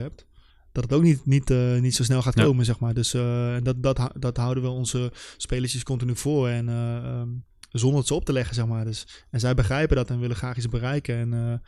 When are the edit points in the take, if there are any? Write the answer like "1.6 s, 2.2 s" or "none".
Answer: none